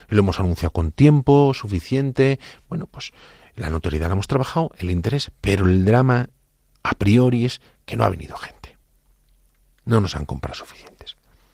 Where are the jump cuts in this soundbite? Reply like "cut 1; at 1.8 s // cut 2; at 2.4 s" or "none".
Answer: none